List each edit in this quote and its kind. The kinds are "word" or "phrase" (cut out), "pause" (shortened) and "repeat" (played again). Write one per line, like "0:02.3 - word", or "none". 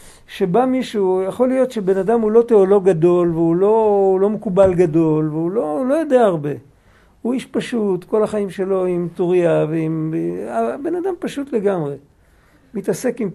none